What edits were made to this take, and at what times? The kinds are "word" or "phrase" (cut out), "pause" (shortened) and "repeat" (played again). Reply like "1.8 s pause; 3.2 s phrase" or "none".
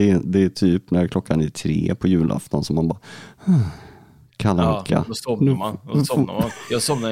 none